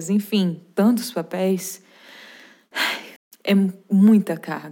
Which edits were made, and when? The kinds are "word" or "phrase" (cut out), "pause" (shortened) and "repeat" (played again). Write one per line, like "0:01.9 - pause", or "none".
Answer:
0:03.2 - pause